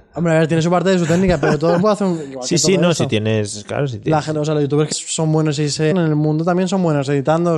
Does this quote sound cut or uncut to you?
cut